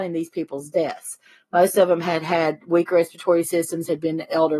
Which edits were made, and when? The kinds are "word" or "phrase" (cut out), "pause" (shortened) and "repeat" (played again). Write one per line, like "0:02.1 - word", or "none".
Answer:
none